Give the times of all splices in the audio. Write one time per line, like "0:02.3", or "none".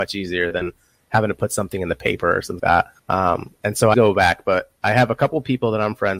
0:02.6
0:03.0
0:03.9